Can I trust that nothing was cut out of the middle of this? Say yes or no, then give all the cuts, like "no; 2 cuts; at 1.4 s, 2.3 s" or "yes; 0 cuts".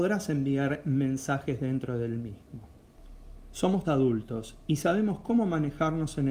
no; 1 cut; at 3.8 s